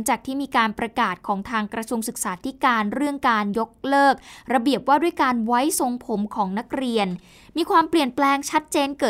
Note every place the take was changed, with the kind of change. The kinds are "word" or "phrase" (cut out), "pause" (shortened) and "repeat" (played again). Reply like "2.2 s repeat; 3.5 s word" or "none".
none